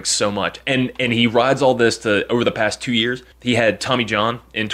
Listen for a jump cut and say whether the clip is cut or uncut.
cut